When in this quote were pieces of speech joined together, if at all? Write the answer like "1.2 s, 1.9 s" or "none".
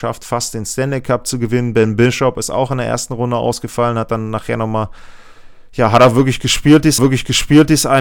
7.0 s